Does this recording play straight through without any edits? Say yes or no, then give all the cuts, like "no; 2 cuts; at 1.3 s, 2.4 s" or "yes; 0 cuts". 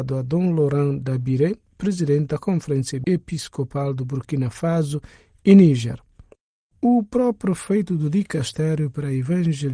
yes; 0 cuts